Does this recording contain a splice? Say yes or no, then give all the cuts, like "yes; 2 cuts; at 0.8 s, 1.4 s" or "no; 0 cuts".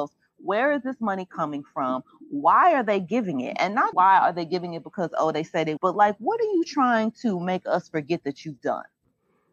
yes; 2 cuts; at 3.9 s, 5.8 s